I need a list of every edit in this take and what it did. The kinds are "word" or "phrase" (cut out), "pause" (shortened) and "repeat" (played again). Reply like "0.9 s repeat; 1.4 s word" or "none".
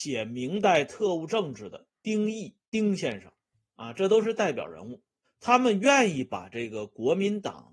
5.2 s pause